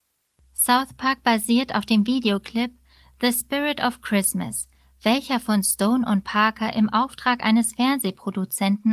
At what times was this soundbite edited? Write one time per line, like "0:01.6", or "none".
none